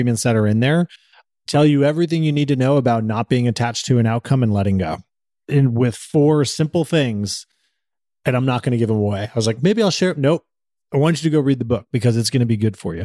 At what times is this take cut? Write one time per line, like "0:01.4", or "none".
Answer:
none